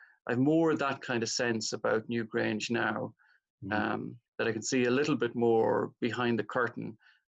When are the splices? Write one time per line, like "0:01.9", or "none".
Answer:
0:04.3